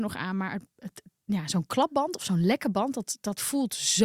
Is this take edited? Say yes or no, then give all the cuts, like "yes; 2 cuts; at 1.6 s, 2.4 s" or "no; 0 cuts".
no; 0 cuts